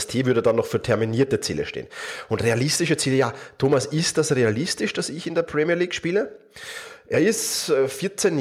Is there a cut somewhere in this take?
no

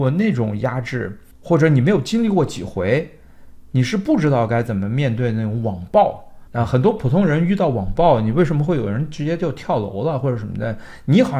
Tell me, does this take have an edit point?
yes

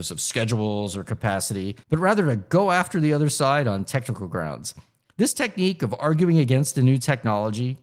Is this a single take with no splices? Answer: no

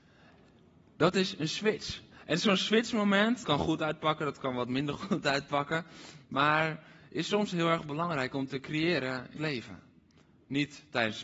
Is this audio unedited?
no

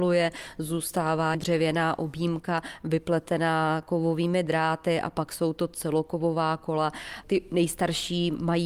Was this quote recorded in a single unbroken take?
no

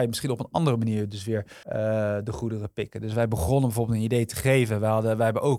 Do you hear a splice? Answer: yes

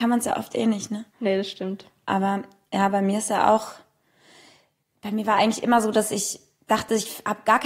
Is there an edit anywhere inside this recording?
no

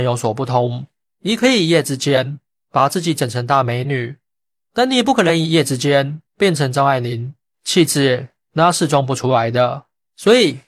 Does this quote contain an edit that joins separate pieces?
yes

